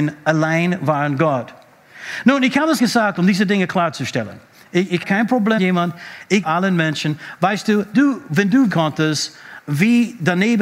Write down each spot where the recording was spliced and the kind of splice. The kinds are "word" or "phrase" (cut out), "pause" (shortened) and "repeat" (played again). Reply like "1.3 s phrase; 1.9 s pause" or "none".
2.8 s word; 5.0 s word; 5.6 s word; 6.4 s word; 7.9 s word; 8.7 s word